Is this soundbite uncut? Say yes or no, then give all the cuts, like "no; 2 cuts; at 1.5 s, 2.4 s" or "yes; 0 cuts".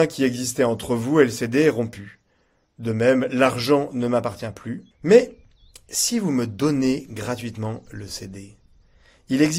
no; 1 cut; at 4.9 s